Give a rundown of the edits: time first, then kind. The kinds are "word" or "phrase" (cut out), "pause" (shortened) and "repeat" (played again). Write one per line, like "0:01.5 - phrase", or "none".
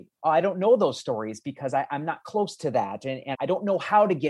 0:03.3 - word